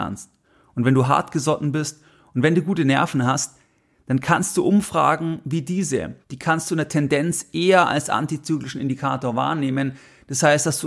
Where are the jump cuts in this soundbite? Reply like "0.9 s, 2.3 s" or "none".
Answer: 6.2 s

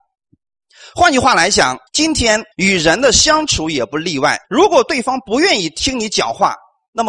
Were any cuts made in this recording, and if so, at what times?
1.9 s, 2.5 s, 4.4 s

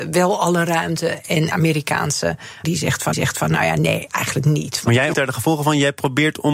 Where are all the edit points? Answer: 1.5 s, 2.6 s, 3.1 s, 4.1 s, 5.1 s

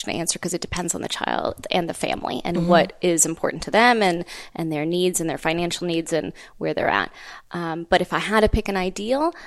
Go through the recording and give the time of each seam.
none

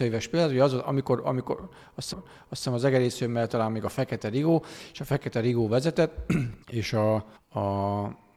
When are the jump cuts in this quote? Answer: 2.1 s, 3.5 s, 6.6 s, 7.4 s

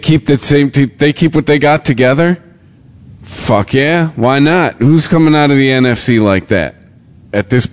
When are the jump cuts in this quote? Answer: none

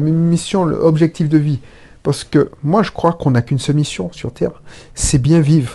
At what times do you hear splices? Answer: none

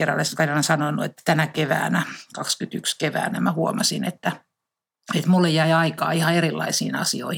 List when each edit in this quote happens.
none

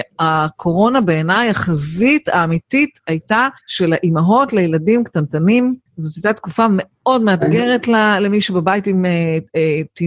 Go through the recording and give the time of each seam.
3.6 s, 5.9 s

